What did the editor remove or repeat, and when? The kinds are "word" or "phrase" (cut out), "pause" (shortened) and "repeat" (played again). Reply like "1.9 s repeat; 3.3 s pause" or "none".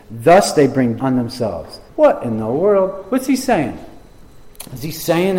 1.0 s word; 1.9 s pause